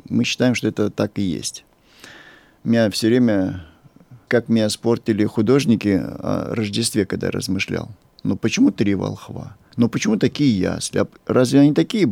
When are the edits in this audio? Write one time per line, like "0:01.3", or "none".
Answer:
0:04.3